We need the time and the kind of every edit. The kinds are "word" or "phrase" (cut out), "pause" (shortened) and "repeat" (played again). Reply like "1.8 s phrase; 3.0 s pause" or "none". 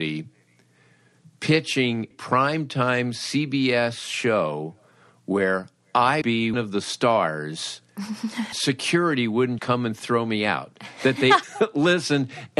2.1 s word; 6.2 s word; 6.5 s word; 8.5 s word; 9.6 s word; 11.4 s word